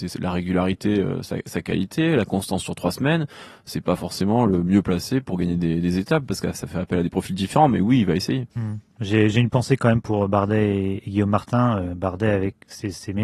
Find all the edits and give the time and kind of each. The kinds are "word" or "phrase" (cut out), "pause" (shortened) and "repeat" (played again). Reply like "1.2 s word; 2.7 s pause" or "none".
8.5 s pause